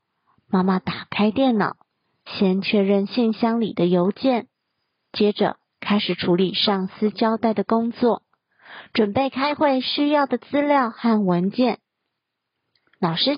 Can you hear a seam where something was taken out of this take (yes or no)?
no